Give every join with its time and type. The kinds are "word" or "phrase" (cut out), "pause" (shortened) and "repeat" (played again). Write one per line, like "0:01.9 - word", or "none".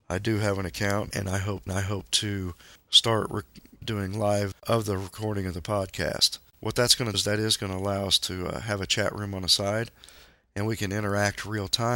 0:01.1 - phrase
0:01.7 - repeat
0:03.8 - word
0:04.5 - phrase
0:07.1 - word